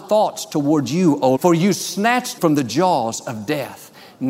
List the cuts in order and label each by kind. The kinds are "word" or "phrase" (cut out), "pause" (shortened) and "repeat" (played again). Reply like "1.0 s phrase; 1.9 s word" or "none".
1.4 s word; 2.4 s word